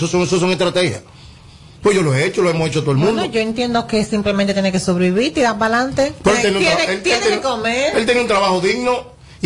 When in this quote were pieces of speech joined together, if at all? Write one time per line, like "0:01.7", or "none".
none